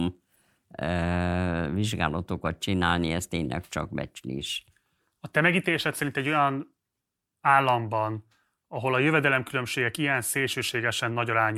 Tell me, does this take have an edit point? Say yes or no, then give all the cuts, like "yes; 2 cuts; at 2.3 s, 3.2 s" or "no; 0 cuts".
no; 0 cuts